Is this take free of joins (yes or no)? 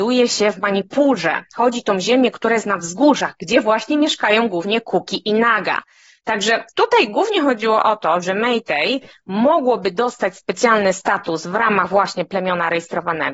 yes